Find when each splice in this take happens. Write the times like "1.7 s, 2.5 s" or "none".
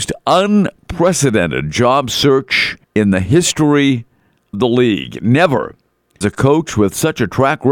2.8 s, 4.5 s, 6.2 s